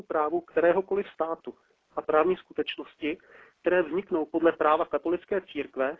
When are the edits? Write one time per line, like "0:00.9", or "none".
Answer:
none